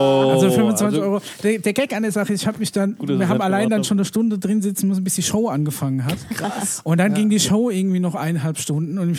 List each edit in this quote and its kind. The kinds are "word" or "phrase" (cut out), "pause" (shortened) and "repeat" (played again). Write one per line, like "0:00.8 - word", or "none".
none

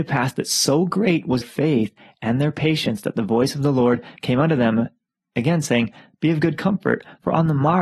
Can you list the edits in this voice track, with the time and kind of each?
0:01.4 - word

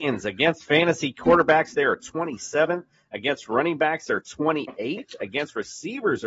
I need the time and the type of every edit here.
none

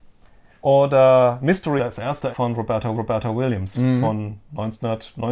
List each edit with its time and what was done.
0:01.8 - word
0:02.3 - word
0:02.9 - repeat

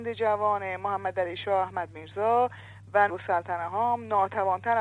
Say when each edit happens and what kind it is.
0:03.1 - word

